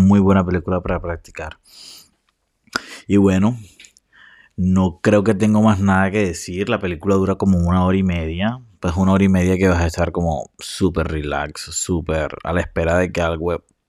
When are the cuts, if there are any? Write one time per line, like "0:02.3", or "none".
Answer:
none